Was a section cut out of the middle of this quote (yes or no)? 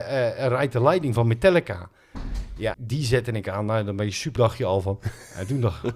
yes